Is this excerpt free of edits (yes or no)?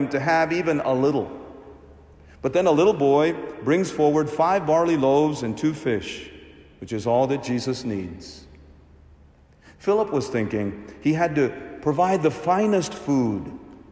yes